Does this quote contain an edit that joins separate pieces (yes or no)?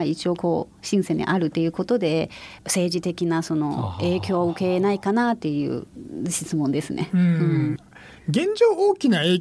yes